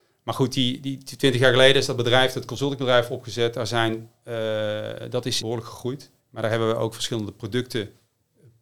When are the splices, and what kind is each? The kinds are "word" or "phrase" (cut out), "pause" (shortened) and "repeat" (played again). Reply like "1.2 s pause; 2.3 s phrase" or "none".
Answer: 5.4 s phrase; 6.2 s pause

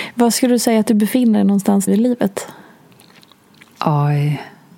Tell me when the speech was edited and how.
1.9 s word

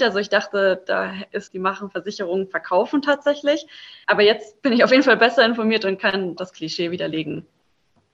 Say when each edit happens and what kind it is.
1.5 s phrase; 6.4 s word

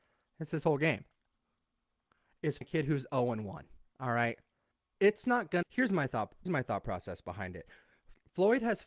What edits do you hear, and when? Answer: 2.6 s word; 4.7 s pause; 5.6 s phrase; 6.5 s word

